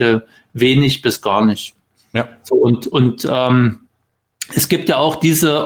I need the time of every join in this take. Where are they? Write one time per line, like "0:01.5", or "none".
none

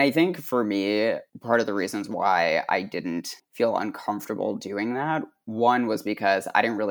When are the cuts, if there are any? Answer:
0:01.3

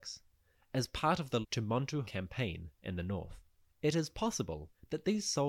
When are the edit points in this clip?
0:01.4
0:02.0
0:03.7

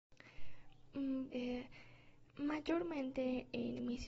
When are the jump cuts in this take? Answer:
0:01.3
0:02.3

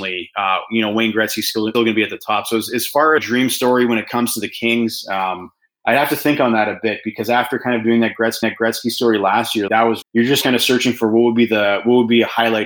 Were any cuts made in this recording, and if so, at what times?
0:01.7
0:03.2
0:08.4
0:09.7
0:10.0
0:10.4

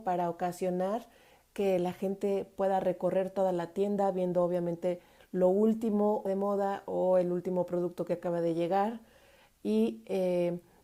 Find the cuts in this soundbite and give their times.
0:06.3

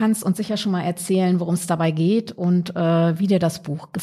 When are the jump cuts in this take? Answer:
none

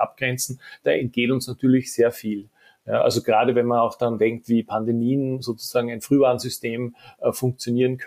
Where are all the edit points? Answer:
none

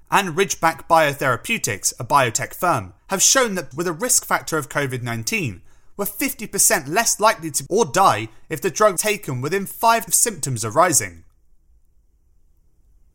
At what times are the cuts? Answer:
0:03.0
0:03.7
0:07.7
0:09.0
0:10.1

